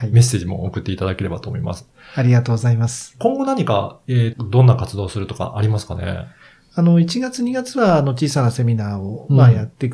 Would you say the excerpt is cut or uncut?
cut